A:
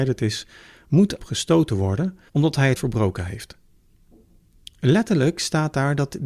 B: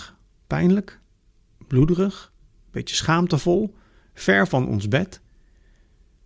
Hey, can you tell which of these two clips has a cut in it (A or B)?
A